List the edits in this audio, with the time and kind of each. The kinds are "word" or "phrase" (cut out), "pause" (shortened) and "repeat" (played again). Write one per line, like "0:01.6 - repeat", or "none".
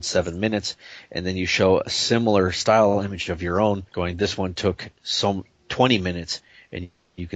0:03.9 - pause